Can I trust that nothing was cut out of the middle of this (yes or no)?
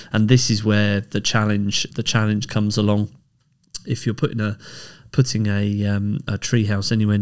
no